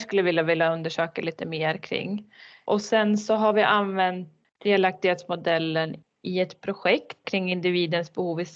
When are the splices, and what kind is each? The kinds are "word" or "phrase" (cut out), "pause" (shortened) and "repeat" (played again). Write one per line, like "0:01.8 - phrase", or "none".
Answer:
none